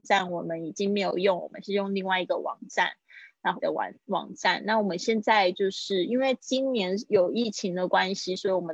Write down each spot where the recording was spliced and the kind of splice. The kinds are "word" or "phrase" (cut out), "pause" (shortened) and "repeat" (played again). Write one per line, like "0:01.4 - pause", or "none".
0:03.6 - word